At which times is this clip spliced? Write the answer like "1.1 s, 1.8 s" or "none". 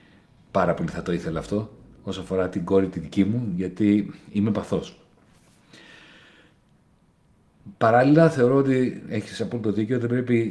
none

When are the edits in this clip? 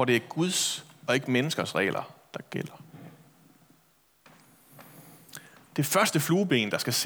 none

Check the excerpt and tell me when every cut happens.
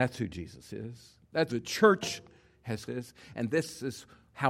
1.5 s, 2.9 s

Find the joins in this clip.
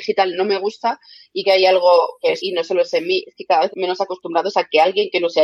1.4 s, 2.4 s, 3.7 s

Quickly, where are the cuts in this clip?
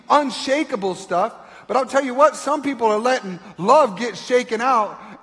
none

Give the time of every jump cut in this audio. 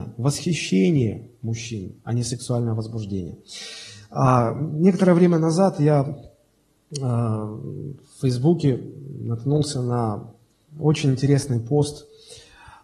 none

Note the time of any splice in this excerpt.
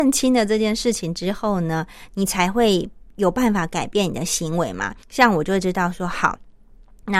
5.0 s

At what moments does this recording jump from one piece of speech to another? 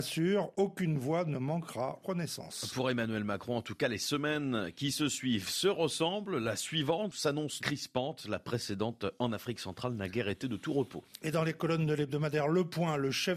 2.0 s, 7.6 s

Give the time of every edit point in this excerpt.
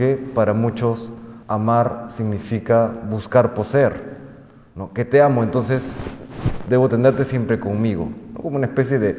1.4 s

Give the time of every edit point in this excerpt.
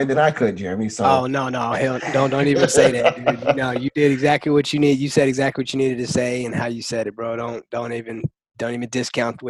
none

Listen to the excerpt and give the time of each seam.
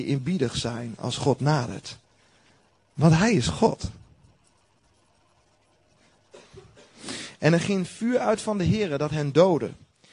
2.5 s

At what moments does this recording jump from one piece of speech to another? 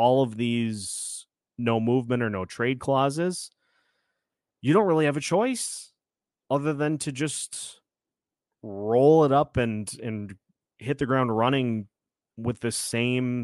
none

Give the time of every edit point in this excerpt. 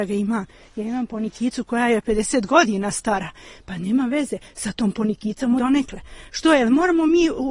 5.6 s

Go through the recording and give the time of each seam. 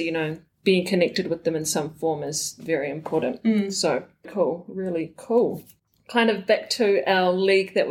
4.2 s, 5.8 s

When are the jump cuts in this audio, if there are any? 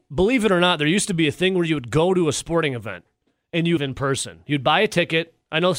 3.8 s

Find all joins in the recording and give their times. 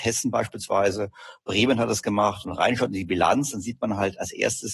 2.5 s

